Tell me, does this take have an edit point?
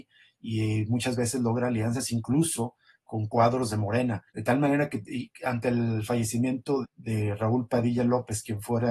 yes; 2 cuts; at 4.3 s, 6.8 s

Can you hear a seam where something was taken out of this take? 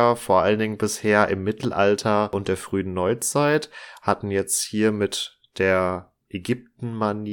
yes; 1 cut; at 6.2 s

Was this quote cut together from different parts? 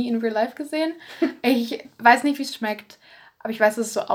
no; 0 cuts

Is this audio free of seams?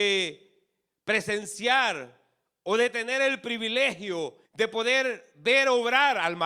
no; 1 cut; at 4.5 s

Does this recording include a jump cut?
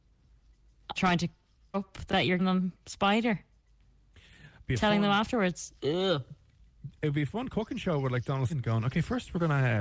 yes; 6 cuts; at 1.0 s, 1.7 s, 2.1 s, 2.4 s, 5.8 s, 8.5 s

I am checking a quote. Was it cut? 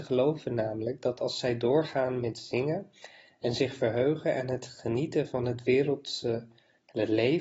no; 0 cuts

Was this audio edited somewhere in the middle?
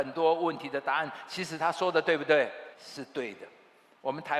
yes; 1 cut; at 2.7 s

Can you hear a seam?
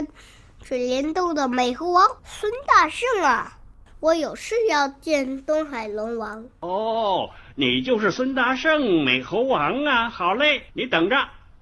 yes; 2 cuts; at 2.2 s, 10.7 s

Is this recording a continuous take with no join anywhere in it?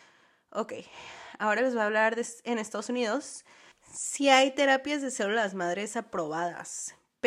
yes; 0 cuts

